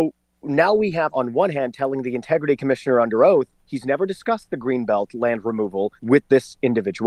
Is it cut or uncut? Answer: cut